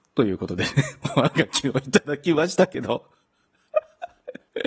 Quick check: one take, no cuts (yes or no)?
yes